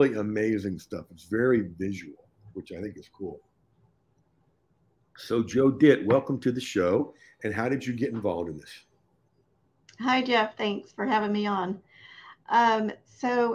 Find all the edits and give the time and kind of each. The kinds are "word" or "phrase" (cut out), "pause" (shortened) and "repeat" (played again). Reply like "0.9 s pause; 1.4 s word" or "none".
none